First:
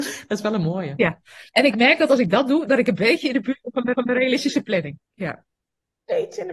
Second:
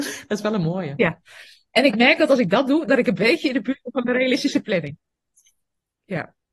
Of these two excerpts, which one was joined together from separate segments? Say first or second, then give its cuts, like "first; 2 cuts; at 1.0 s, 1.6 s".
first; 3 cuts; at 1.5 s, 3.9 s, 5.0 s